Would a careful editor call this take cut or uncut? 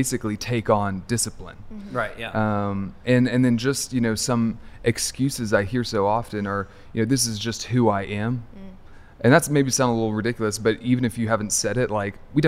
uncut